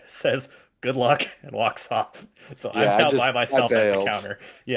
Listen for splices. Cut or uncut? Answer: uncut